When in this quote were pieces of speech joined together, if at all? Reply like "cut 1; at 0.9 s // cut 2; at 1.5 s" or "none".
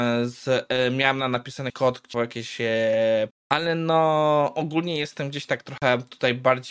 cut 1; at 1.7 s // cut 2; at 2.1 s // cut 3; at 3.3 s